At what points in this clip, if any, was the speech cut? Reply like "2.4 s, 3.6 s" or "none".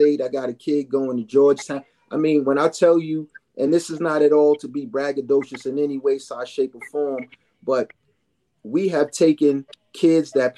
none